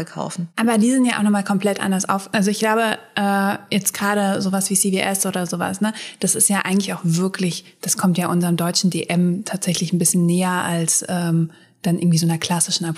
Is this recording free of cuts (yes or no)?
yes